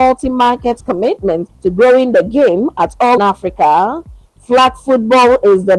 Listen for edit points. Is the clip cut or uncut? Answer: cut